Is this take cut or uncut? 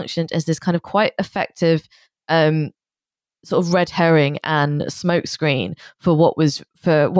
uncut